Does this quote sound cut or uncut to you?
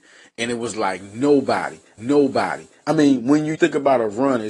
cut